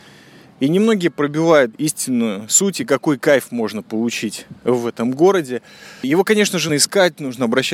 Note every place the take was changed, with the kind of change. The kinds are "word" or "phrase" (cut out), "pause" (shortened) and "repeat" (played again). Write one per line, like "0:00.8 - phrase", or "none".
0:01.7 - word
0:06.7 - word